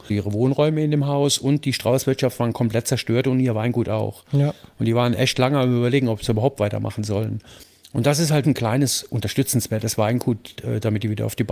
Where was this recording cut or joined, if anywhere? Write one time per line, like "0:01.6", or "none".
0:08.4